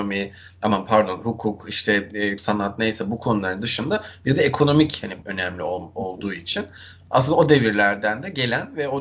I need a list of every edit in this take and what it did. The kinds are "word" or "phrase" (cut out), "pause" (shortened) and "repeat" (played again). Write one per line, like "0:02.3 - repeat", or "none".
0:02.4 - word
0:05.2 - word